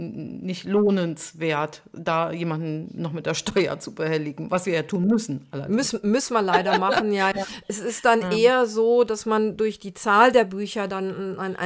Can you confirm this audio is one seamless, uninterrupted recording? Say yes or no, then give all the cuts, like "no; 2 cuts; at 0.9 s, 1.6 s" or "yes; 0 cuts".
no; 1 cut; at 7.3 s